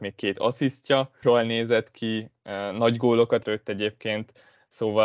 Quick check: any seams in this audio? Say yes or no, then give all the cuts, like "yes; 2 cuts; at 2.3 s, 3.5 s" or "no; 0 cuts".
yes; 2 cuts; at 1.2 s, 3.4 s